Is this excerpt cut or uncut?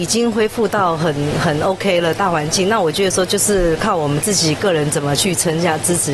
uncut